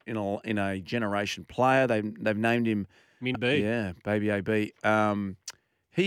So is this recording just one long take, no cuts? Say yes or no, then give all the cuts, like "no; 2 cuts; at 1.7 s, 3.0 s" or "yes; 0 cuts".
no; 1 cut; at 3.3 s